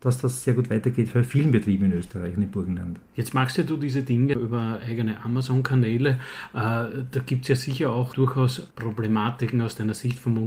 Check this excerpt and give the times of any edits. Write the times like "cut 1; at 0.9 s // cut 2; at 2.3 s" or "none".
cut 1; at 4.4 s // cut 2; at 8.7 s